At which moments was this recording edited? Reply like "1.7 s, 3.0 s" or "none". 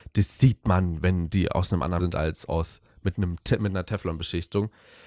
2.0 s